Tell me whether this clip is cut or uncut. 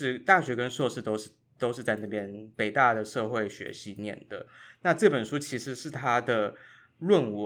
cut